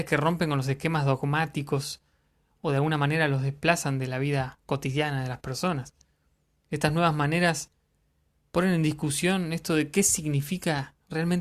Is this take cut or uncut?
uncut